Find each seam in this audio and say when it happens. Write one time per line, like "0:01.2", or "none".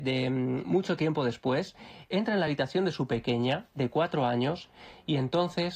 none